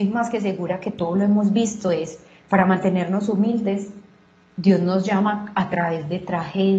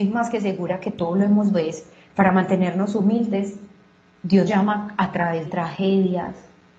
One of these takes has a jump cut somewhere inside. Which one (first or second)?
second